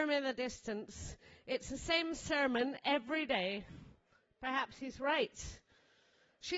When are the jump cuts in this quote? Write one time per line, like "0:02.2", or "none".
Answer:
none